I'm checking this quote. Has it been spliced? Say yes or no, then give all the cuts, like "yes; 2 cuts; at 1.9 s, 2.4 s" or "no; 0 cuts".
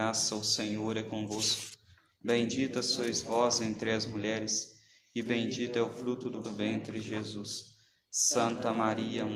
yes; 1 cut; at 6.4 s